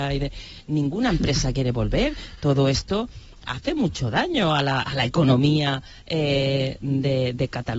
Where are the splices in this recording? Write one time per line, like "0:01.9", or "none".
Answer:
none